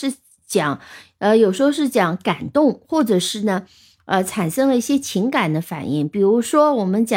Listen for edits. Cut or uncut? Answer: uncut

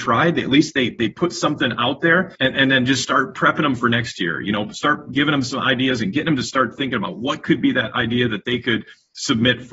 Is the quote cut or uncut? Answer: cut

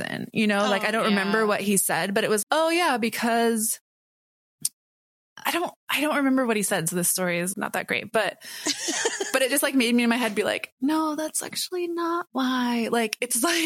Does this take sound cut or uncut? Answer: cut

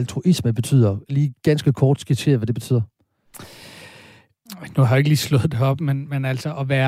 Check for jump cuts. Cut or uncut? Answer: uncut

